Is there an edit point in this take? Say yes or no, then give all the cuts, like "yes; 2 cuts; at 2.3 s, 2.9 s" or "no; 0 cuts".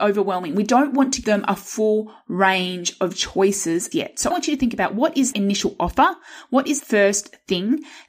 yes; 5 cuts; at 1.2 s, 3.9 s, 4.3 s, 5.3 s, 6.8 s